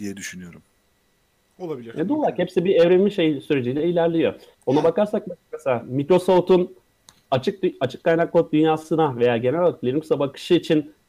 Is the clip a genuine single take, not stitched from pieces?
yes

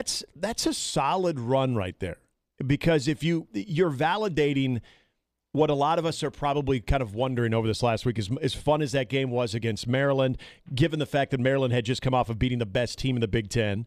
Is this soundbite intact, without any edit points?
yes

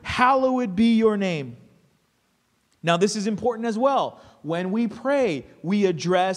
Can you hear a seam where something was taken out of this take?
no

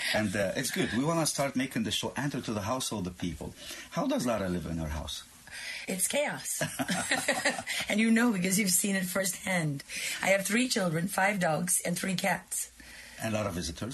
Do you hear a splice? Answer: no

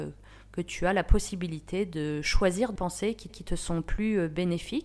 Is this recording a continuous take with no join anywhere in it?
no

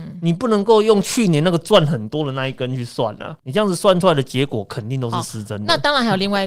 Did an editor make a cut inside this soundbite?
yes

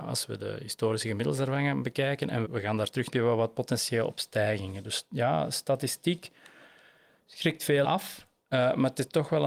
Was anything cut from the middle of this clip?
yes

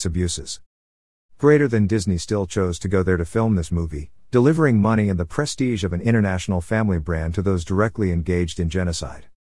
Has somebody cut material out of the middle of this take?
no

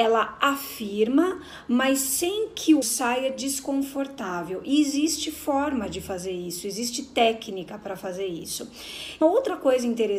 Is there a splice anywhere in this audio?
yes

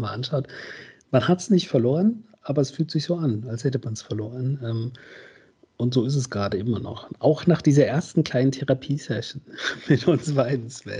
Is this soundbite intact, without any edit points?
yes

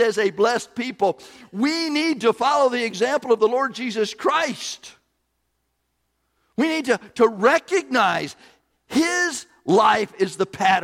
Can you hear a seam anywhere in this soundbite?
no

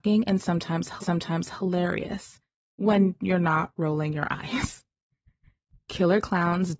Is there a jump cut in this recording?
yes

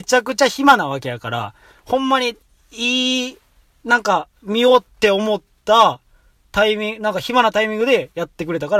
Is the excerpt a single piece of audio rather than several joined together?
yes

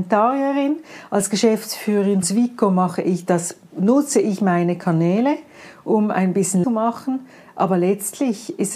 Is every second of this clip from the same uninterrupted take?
no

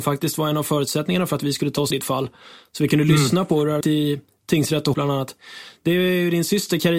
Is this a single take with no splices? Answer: no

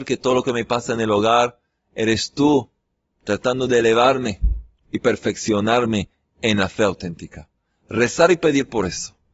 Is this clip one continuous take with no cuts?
yes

